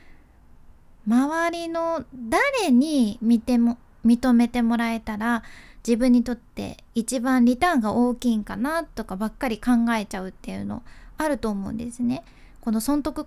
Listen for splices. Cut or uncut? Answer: uncut